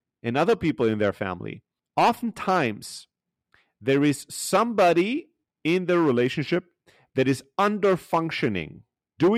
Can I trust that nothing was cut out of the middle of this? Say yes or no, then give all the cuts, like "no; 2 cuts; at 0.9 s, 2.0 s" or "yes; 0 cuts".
yes; 0 cuts